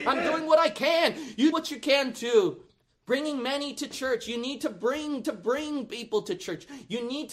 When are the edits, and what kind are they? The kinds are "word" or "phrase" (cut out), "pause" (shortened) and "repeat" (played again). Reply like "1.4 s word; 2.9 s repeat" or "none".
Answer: 1.5 s word; 2.7 s pause; 5.2 s repeat